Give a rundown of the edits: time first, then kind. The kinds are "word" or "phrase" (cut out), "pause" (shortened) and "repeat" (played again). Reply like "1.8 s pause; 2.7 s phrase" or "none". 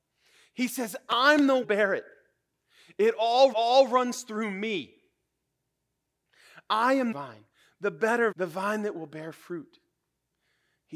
1.6 s phrase; 3.5 s repeat; 7.1 s phrase; 8.3 s word